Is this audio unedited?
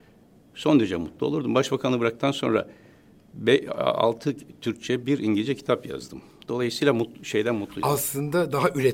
yes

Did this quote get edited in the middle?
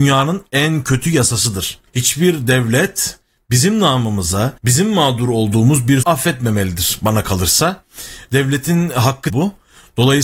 yes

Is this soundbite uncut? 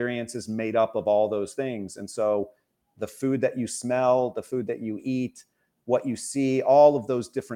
yes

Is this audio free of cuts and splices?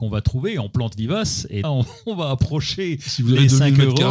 no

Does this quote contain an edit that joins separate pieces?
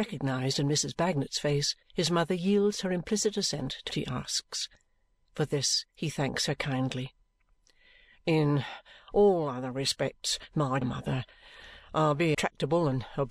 yes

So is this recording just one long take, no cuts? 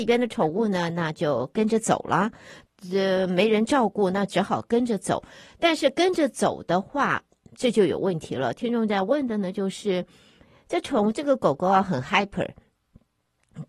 yes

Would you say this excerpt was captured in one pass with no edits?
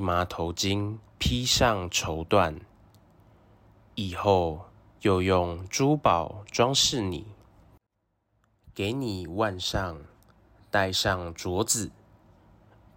no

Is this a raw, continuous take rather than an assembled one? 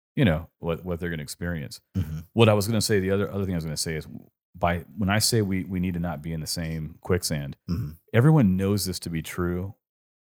yes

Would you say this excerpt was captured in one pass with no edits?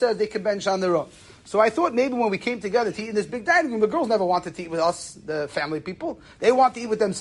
yes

